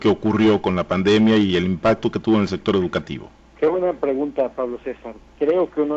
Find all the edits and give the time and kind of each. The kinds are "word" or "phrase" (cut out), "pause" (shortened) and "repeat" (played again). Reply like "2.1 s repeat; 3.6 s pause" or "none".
3.4 s pause